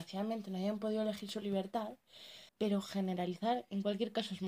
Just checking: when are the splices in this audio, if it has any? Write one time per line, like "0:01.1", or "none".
0:02.5